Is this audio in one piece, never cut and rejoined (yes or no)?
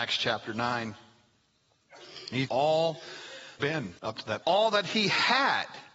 no